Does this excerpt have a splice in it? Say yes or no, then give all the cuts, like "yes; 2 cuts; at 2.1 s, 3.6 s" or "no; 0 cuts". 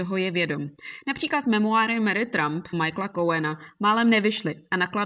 yes; 1 cut; at 2.7 s